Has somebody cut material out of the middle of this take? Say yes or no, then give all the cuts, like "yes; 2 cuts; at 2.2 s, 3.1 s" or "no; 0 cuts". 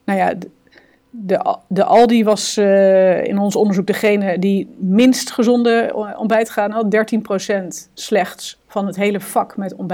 no; 0 cuts